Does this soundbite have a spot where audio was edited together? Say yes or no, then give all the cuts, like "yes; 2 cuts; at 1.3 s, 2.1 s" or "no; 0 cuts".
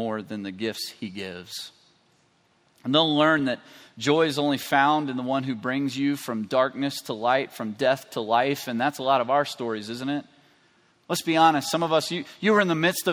no; 0 cuts